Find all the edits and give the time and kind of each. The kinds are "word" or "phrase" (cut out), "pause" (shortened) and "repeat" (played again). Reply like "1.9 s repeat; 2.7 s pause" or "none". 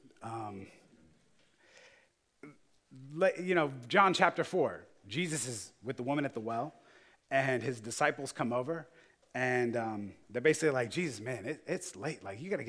none